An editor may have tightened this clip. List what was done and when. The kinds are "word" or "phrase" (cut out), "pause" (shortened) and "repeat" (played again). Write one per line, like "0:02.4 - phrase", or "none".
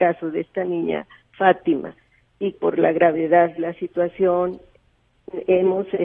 0:01.2 - pause
0:02.5 - word
0:03.6 - word

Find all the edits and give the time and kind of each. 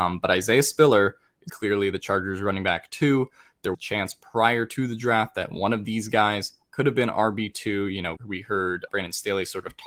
0:01.5 - word
0:03.7 - word
0:08.2 - word
0:08.9 - word

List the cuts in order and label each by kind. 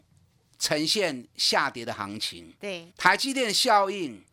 0:02.9 - pause

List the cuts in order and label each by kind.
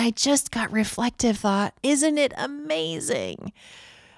0:01.4 - word
0:01.8 - word

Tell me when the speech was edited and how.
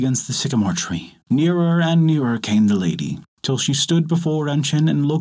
0:01.2 - pause
0:03.3 - pause

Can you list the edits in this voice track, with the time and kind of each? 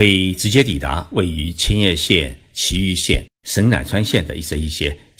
0:03.3 - pause

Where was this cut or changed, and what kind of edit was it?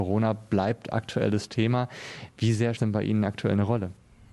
0:02.8 - phrase

